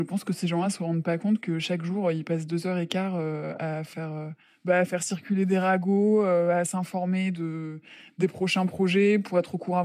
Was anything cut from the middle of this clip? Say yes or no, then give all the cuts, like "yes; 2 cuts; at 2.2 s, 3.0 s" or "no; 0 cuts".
yes; 1 cut; at 4.4 s